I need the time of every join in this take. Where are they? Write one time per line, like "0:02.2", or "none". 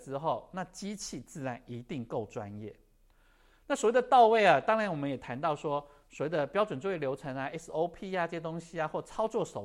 none